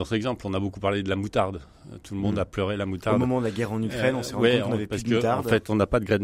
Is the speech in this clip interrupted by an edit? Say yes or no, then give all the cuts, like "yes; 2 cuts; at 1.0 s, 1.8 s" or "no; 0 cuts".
no; 0 cuts